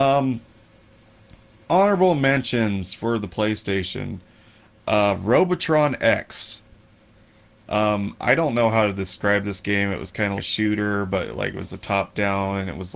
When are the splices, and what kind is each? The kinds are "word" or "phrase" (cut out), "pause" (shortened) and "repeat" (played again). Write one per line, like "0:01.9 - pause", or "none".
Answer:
0:10.4 - word